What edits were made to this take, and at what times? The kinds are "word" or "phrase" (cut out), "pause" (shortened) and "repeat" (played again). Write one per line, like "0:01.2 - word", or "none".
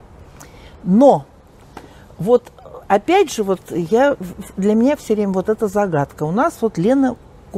none